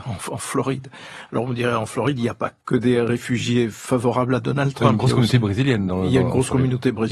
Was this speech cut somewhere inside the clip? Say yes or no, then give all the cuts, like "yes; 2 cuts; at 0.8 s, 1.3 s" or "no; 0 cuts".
no; 0 cuts